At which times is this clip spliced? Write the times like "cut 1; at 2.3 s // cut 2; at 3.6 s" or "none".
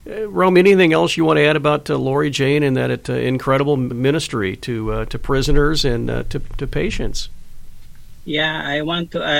cut 1; at 3.9 s